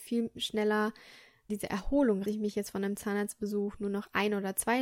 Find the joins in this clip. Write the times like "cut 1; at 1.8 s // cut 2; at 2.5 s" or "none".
cut 1; at 1.5 s // cut 2; at 2.2 s